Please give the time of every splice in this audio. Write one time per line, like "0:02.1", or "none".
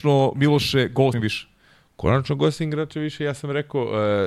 0:01.1

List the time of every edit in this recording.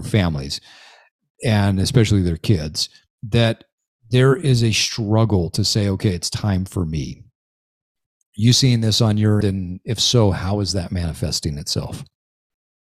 0:09.4

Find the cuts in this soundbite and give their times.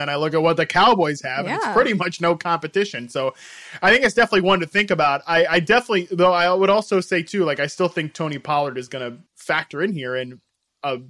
0:09.3

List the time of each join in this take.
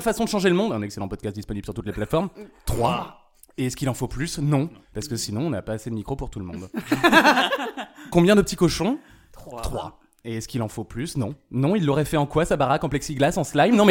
none

